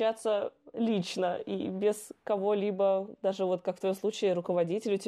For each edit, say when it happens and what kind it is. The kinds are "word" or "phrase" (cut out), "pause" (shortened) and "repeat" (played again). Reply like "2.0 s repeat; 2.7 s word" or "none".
none